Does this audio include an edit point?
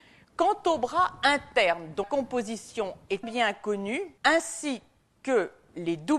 yes; 3 cuts; at 2.0 s, 3.2 s, 4.2 s

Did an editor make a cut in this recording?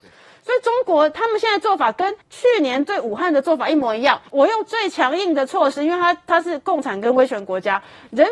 yes; 2 cuts; at 2.2 s, 4.3 s

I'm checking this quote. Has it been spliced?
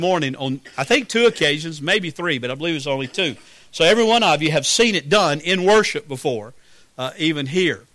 no; 0 cuts

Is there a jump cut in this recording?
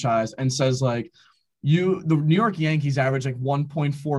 no; 0 cuts

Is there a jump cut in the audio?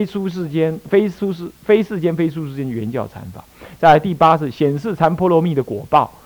yes; 1 cut; at 1.6 s

